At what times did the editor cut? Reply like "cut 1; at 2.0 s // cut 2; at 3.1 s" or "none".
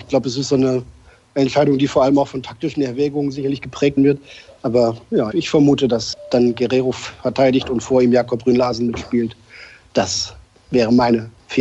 cut 1; at 4.0 s // cut 2; at 5.3 s